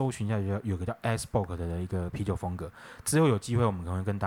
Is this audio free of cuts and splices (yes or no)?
yes